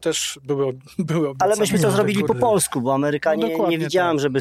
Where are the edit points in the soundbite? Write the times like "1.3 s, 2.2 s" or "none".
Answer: none